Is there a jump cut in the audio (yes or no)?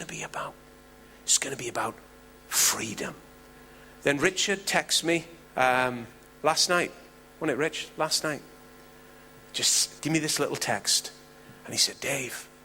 yes